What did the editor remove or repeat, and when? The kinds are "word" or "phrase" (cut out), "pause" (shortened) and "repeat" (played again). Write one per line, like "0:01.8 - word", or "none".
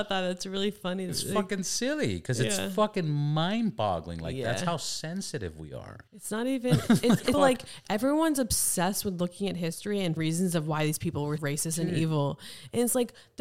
0:01.1 - word
0:06.1 - pause
0:07.3 - word
0:10.2 - word
0:11.4 - word